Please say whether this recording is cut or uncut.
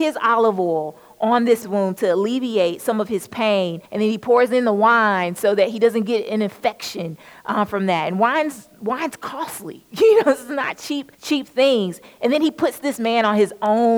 cut